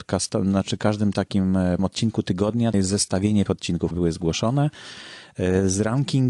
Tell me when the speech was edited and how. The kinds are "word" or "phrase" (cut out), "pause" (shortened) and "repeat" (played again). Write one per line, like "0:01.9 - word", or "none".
0:01.8 - word
0:02.7 - word
0:03.5 - word
0:03.9 - word